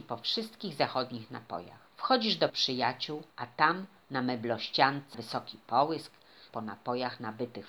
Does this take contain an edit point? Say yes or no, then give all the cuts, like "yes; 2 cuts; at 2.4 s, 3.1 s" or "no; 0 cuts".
yes; 5 cuts; at 1.9 s, 2.5 s, 3.3 s, 5.1 s, 6.5 s